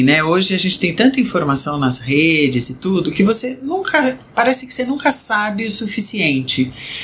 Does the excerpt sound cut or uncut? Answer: uncut